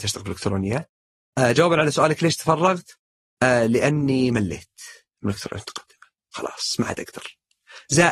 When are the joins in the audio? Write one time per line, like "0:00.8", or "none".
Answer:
none

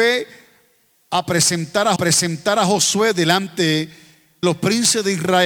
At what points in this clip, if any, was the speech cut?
0:02.0
0:04.4

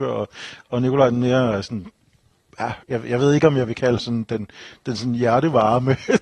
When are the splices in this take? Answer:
0:02.8
0:04.0

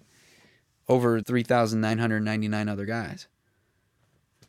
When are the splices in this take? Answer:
0:01.2

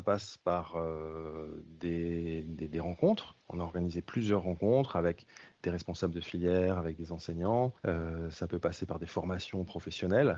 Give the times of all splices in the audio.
0:03.4
0:07.8

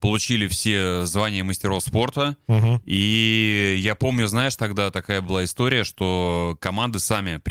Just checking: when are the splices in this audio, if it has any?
none

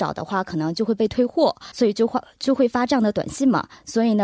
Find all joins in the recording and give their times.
0:01.7

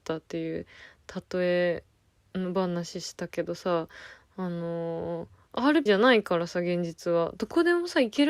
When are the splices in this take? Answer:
0:05.9

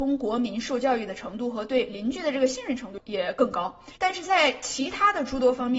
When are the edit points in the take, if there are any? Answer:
0:04.0

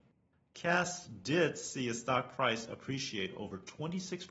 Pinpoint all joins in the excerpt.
none

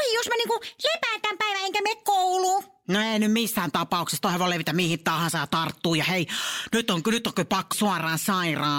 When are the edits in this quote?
0:07.7

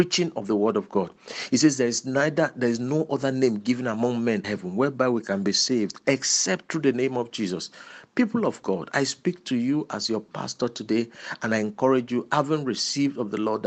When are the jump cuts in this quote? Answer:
0:04.4

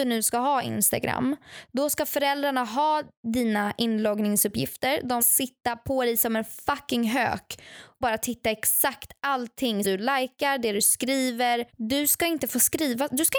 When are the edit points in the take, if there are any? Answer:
0:05.2
0:08.0
0:09.8
0:11.7

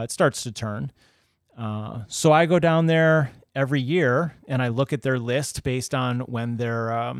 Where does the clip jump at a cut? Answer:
none

